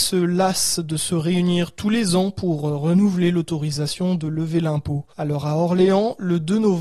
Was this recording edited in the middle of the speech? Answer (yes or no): yes